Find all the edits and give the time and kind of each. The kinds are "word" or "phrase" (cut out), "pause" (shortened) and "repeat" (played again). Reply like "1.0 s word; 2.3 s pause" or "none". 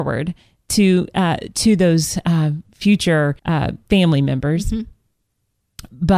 3.4 s pause